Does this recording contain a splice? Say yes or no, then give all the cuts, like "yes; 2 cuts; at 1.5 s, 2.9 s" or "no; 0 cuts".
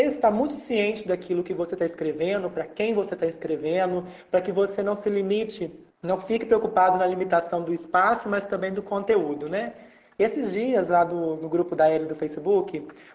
yes; 1 cut; at 5.9 s